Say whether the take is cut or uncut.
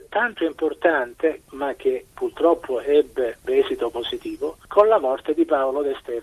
uncut